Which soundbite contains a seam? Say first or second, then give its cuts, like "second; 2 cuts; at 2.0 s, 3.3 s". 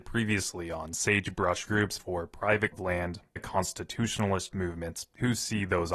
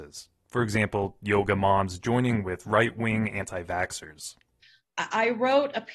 first; 5 cuts; at 1.7 s, 2.0 s, 2.7 s, 3.4 s, 4.5 s